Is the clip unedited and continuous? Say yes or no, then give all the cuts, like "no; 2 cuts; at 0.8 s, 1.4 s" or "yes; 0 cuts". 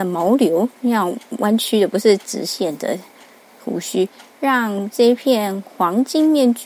yes; 0 cuts